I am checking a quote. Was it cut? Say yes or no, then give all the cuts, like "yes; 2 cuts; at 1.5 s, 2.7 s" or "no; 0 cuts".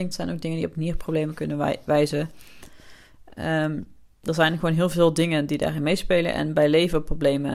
no; 0 cuts